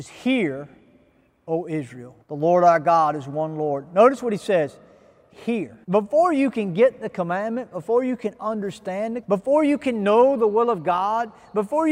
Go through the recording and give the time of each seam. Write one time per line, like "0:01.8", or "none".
0:02.2
0:05.3
0:05.8
0:09.2

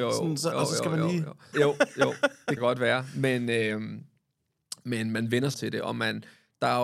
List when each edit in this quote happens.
0:01.5
0:02.6
0:05.5

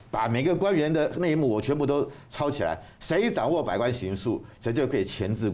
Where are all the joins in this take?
none

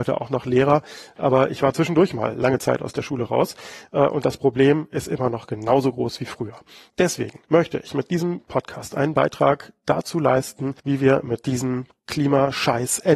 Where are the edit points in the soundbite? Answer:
0:07.4
0:10.8

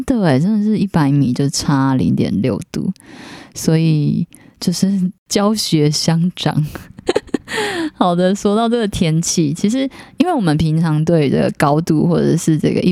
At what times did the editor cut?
none

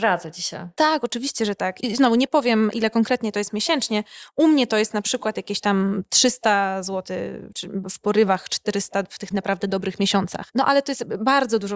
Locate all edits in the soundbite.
0:07.5
0:09.3

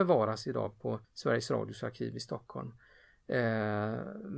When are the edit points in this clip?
0:01.0

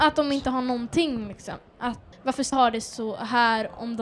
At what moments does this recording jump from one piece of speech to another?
0:02.1
0:02.5

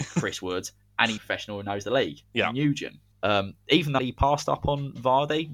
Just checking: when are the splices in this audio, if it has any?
0:01.2
0:02.2
0:03.1
0:04.0

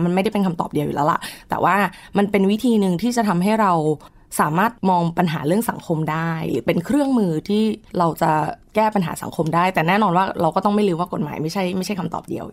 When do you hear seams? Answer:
0:07.9

